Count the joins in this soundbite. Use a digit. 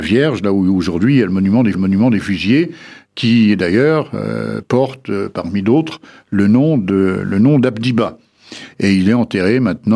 1